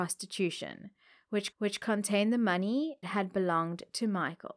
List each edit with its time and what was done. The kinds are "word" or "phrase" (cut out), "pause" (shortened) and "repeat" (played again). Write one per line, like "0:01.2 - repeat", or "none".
0:01.5 - repeat
0:03.0 - word